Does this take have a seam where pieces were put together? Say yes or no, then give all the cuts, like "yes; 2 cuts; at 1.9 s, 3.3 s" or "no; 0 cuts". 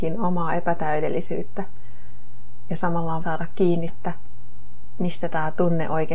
yes; 2 cuts; at 3.2 s, 3.9 s